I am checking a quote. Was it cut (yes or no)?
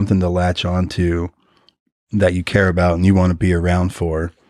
no